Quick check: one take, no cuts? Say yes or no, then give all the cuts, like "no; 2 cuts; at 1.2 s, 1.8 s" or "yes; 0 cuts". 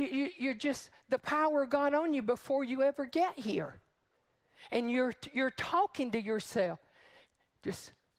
yes; 0 cuts